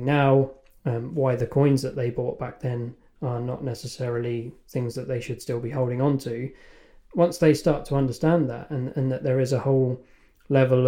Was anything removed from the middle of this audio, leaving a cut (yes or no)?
no